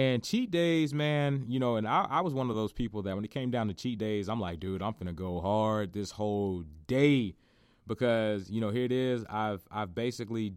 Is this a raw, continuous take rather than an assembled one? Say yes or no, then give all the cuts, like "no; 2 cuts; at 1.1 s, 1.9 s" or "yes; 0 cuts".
yes; 0 cuts